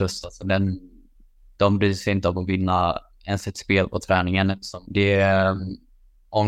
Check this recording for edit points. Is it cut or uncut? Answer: cut